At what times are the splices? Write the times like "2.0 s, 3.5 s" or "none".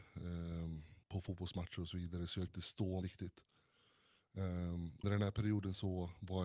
1.0 s, 2.5 s, 3.0 s, 5.0 s